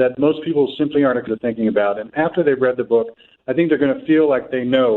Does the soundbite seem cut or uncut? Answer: cut